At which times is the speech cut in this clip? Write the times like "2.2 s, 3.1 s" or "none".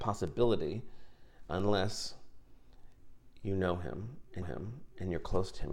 4.4 s

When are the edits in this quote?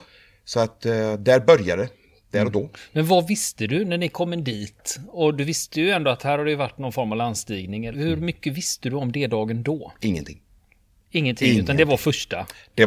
7.9 s

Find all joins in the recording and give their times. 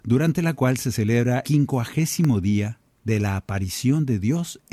1.4 s, 2.9 s

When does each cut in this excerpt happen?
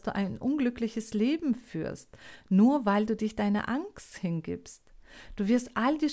none

